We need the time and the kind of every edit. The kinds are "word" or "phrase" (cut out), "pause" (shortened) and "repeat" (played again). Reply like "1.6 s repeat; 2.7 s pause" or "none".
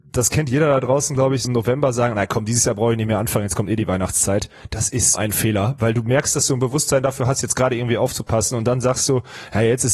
1.4 s word; 5.1 s word